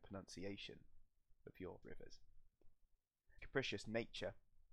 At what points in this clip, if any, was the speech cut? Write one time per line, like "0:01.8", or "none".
0:01.8
0:03.4